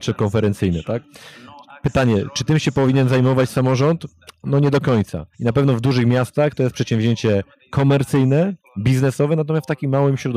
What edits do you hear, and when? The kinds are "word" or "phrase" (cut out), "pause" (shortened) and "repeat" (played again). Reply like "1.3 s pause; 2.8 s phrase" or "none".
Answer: 5.3 s pause